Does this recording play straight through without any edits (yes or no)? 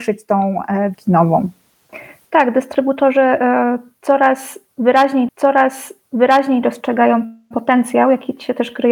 no